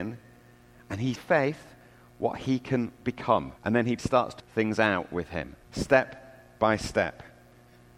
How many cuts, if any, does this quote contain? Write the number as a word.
five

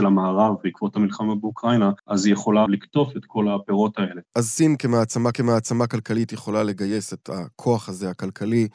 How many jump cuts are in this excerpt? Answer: four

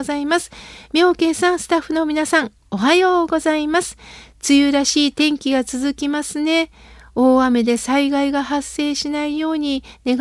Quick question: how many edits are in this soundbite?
zero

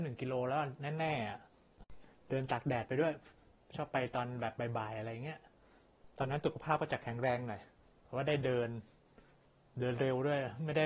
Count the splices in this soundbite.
zero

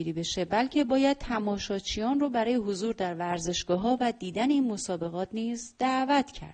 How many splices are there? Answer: zero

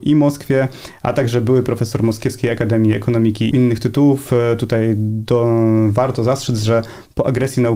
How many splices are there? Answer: one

